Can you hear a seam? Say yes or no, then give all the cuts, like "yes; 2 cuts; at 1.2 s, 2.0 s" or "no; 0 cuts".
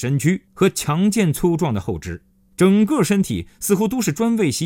no; 0 cuts